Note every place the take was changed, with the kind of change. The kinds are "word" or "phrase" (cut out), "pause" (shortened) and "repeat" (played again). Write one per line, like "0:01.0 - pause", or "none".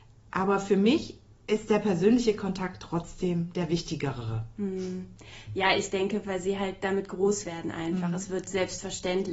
0:01.3 - pause